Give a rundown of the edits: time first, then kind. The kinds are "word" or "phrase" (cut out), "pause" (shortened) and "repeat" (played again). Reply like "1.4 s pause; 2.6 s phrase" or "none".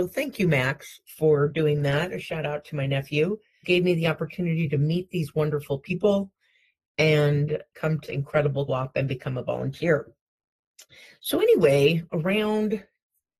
3.6 s word; 8.1 s word; 8.7 s word